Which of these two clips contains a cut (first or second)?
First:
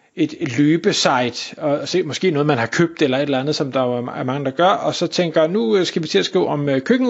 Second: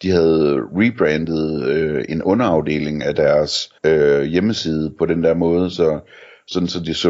second